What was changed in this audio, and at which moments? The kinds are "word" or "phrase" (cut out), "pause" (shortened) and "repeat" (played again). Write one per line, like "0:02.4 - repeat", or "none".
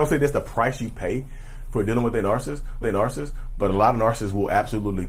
0:02.8 - repeat